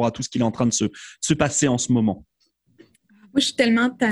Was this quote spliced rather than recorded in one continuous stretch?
no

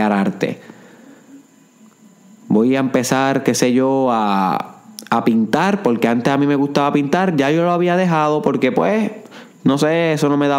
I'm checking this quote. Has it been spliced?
no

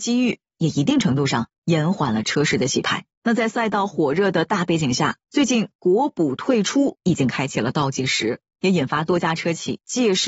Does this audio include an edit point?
yes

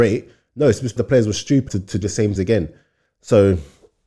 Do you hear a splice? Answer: yes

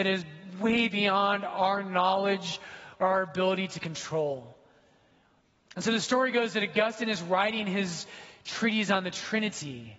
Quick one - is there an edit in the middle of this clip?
no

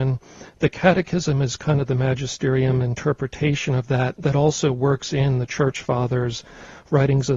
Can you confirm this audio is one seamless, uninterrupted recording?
yes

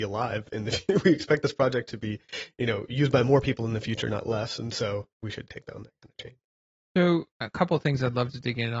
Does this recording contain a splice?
yes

